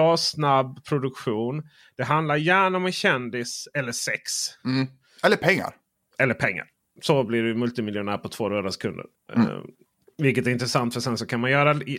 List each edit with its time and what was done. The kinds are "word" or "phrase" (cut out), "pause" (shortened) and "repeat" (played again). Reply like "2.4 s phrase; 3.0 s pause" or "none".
none

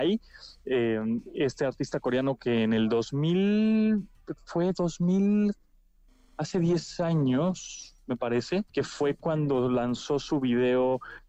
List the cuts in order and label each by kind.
8.7 s pause

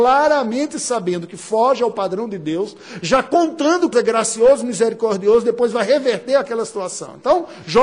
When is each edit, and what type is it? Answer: 3.9 s word

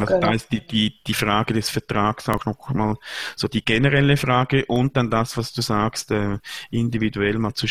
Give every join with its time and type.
none

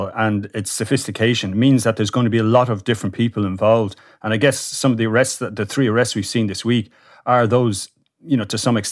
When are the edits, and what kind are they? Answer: none

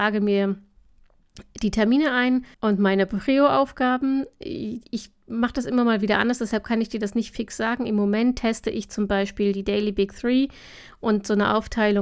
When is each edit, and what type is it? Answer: 2.5 s pause

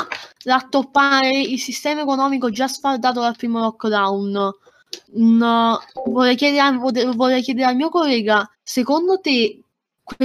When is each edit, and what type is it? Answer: 5.0 s pause; 8.5 s pause

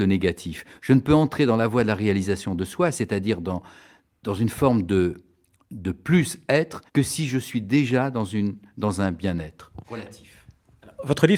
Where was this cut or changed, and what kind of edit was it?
6.9 s pause; 9.8 s pause

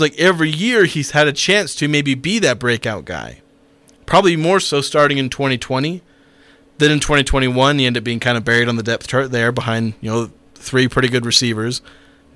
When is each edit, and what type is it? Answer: none

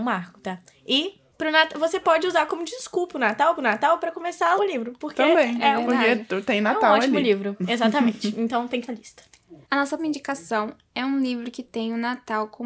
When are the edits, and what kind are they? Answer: 1.3 s pause; 3.6 s repeat; 4.6 s word; 8.9 s phrase; 9.6 s pause; 10.0 s word

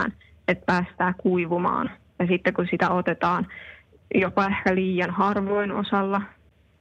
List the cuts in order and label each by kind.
none

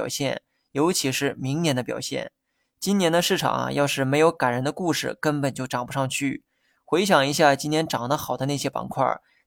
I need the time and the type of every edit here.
none

